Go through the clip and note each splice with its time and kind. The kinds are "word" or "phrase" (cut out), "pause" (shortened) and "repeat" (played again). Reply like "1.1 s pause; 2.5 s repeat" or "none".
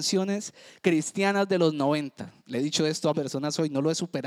2.4 s pause; 3.1 s word